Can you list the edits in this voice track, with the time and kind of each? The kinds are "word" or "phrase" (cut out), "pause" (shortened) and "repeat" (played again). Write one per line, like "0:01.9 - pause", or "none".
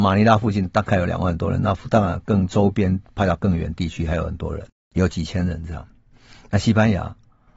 none